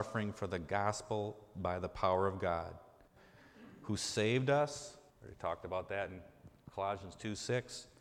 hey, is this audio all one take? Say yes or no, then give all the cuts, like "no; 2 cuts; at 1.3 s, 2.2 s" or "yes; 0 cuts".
no; 1 cut; at 5.1 s